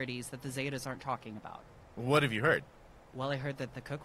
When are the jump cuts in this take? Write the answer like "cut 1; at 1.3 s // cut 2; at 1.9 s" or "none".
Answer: none